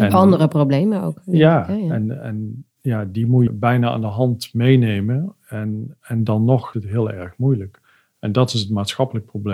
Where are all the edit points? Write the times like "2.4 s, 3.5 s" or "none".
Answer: 3.5 s, 6.7 s

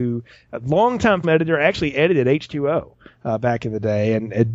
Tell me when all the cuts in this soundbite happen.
1.2 s

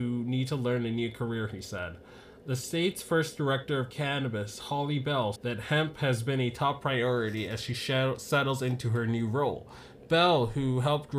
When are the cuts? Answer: 5.4 s

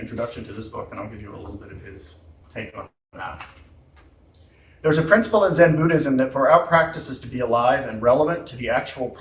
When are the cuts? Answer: 2.4 s

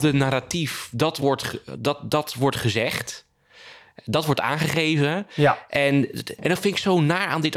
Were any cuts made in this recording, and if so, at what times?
none

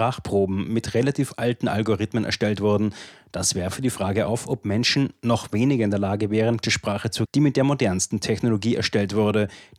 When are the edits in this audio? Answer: 6.6 s, 7.3 s

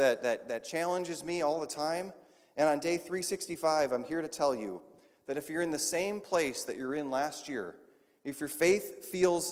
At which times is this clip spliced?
none

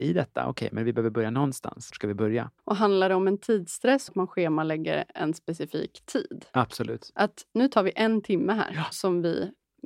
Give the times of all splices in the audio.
1.9 s, 2.6 s, 4.1 s

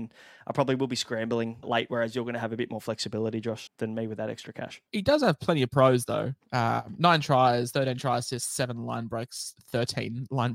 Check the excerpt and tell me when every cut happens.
1.6 s, 3.7 s, 4.9 s

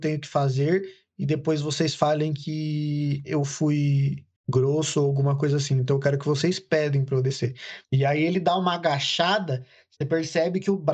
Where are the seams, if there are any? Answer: 4.4 s, 7.8 s

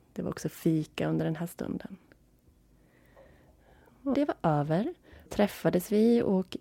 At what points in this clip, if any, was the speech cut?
4.1 s, 5.3 s

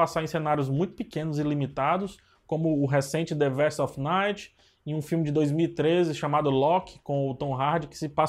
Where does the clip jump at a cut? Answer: none

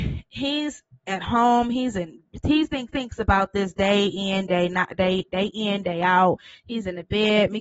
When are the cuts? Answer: 2.9 s

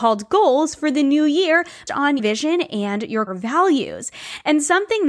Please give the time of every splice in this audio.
1.9 s, 2.2 s, 3.3 s

